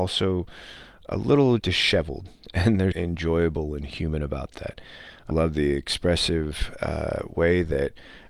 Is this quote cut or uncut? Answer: cut